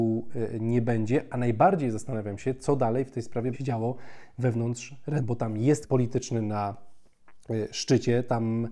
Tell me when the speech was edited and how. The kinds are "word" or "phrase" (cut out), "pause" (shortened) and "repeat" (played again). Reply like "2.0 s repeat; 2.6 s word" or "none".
3.5 s word; 5.2 s word; 5.8 s word